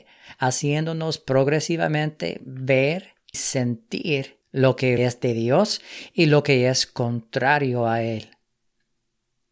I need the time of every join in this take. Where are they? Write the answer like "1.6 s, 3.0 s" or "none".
3.3 s, 4.4 s, 5.0 s